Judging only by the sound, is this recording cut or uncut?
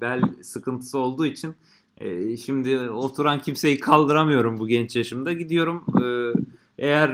uncut